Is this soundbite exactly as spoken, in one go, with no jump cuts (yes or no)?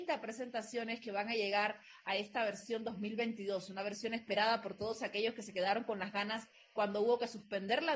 yes